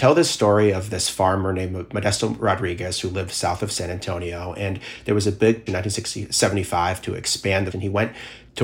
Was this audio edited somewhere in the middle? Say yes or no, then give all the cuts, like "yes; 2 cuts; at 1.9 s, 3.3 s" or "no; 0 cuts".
yes; 2 cuts; at 5.7 s, 7.7 s